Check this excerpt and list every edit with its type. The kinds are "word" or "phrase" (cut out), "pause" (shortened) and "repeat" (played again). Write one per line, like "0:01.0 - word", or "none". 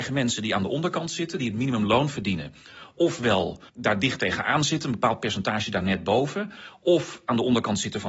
0:03.7 - pause